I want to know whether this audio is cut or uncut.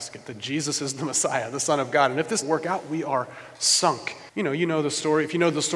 cut